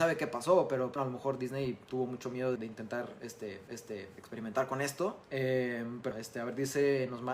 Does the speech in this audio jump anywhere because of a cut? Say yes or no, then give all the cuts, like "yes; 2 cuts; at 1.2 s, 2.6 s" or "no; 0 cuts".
yes; 5 cuts; at 1.0 s, 2.6 s, 3.7 s, 5.2 s, 6.1 s